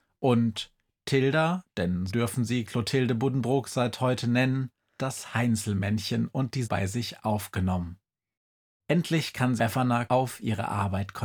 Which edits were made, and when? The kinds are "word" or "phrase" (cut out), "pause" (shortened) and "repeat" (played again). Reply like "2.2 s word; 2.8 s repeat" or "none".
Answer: 2.1 s word; 5.0 s word; 6.6 s word; 9.6 s word; 10.1 s word